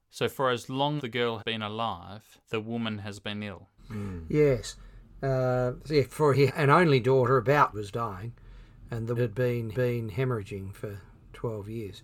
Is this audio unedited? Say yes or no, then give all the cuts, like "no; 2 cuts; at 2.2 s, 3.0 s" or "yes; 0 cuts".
no; 9 cuts; at 1.0 s, 1.4 s, 2.4 s, 3.8 s, 6.1 s, 6.5 s, 7.7 s, 9.2 s, 9.7 s